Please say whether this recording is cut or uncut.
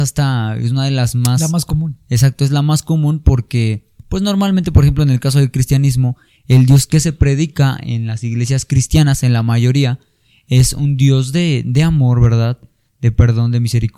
uncut